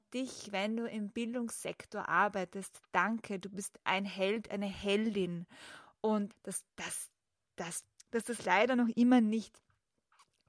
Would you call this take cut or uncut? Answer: cut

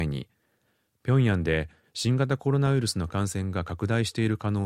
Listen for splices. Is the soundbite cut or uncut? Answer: uncut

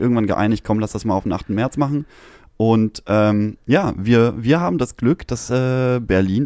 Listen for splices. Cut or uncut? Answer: uncut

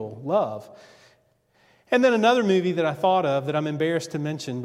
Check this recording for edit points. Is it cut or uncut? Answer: uncut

